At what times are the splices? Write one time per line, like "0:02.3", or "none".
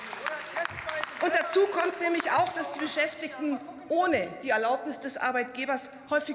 none